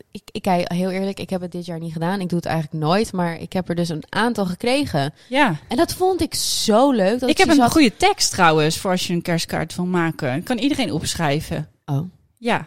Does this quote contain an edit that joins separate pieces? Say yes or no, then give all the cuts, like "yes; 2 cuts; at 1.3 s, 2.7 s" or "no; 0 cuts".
no; 0 cuts